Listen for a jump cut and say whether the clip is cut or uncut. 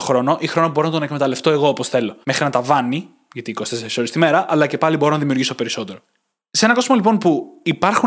cut